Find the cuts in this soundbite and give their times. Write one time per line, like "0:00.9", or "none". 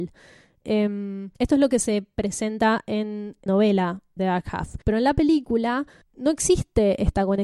0:01.3
0:03.5
0:04.2
0:04.8
0:06.0